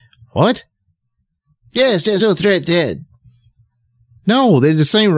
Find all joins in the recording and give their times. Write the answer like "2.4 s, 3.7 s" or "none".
2.2 s